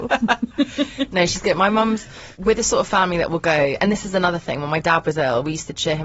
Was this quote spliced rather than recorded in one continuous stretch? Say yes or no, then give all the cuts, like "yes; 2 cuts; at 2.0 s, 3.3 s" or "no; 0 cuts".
no; 0 cuts